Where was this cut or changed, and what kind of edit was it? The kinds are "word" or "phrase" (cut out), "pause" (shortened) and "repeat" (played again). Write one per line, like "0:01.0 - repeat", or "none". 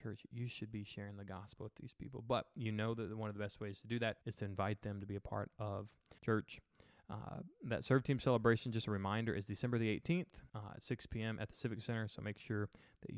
0:04.2 - pause
0:06.2 - pause
0:10.5 - pause